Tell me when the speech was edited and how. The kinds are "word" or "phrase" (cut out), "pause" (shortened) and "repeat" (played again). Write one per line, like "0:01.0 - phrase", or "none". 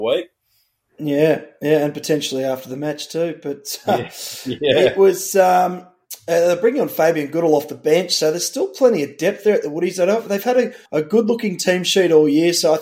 0:10.9 - pause